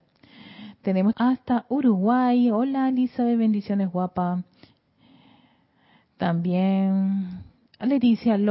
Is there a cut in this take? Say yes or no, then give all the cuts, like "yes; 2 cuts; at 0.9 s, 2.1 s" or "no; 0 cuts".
yes; 1 cut; at 1.1 s